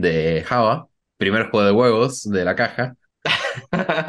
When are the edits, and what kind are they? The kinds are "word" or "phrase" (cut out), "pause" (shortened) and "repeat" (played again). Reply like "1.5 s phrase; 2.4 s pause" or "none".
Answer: none